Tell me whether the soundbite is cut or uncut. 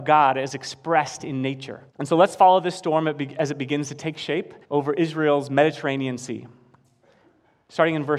cut